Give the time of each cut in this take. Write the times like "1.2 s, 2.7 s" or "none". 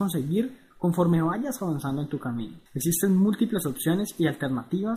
2.7 s